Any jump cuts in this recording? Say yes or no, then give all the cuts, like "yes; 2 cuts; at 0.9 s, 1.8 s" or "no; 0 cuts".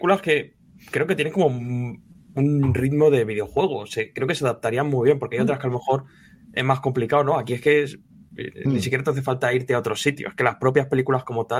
no; 0 cuts